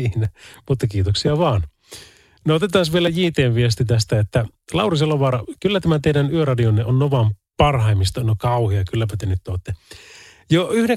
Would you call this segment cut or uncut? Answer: uncut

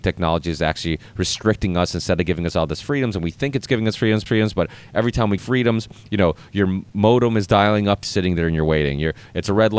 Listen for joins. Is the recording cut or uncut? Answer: cut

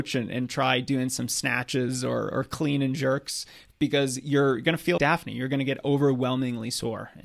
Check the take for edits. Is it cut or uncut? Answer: cut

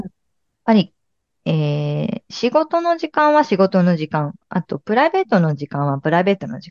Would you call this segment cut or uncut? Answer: uncut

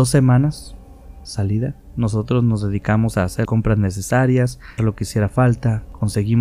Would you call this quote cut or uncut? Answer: cut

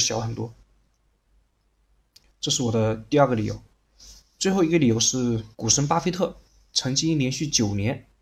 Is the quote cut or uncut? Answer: cut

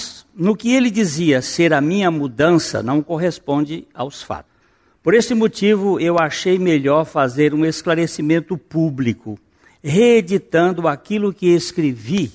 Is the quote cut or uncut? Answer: uncut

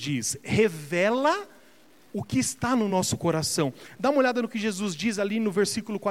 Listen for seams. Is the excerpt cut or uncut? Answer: uncut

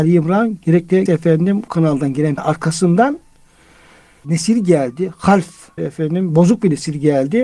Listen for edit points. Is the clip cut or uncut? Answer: cut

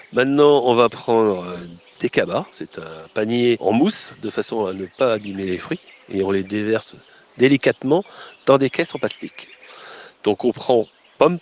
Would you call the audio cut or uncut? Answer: uncut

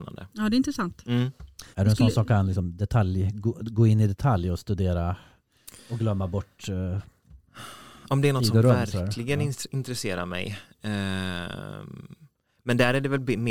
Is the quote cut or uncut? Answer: cut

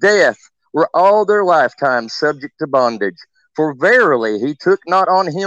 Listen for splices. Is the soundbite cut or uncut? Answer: uncut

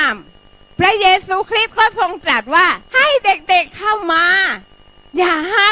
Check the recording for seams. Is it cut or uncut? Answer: cut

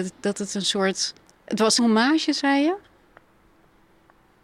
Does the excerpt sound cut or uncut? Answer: cut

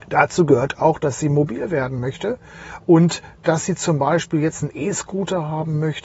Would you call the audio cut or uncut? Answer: uncut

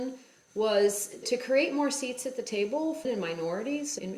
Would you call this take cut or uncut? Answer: cut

